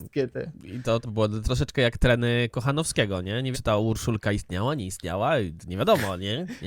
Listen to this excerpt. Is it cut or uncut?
cut